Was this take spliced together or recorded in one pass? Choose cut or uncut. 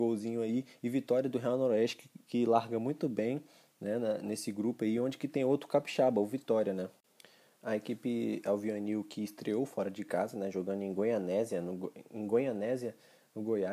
uncut